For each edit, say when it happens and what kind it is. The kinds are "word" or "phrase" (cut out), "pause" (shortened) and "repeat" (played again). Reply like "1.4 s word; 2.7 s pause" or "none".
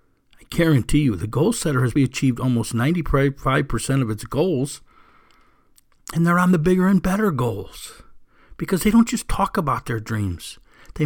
2.0 s word